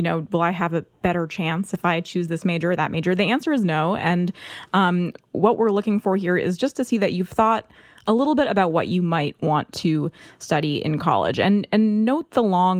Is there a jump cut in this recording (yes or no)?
no